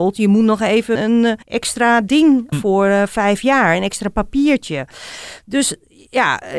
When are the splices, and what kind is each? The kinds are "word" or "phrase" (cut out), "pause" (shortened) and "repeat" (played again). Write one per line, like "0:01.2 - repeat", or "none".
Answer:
0:01.0 - word
0:01.4 - pause
0:02.5 - word

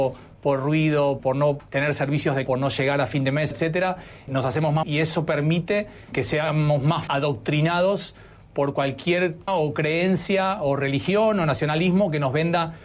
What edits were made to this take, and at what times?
0:01.2 - word
0:01.6 - word
0:02.5 - word
0:03.5 - word
0:04.3 - word
0:04.8 - word
0:06.1 - word
0:07.1 - word
0:09.5 - word

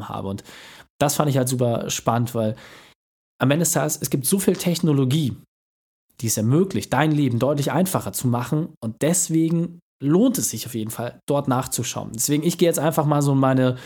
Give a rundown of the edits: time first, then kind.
none

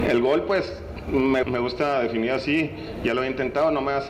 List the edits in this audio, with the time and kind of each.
0:01.4 - word

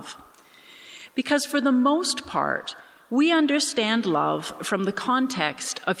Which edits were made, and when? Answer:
none

